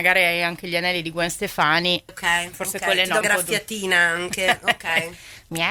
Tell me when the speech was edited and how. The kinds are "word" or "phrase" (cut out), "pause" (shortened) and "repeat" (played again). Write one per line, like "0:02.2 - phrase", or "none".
0:02.1 - word
0:03.2 - phrase